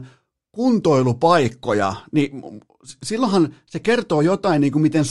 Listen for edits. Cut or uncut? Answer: uncut